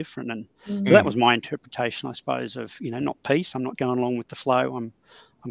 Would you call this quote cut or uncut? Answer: cut